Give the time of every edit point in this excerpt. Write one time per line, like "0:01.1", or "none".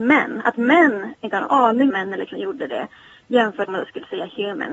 0:01.2
0:01.9
0:02.3
0:03.7